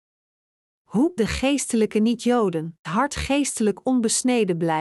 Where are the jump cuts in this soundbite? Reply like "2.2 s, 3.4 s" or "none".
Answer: 1.2 s, 2.8 s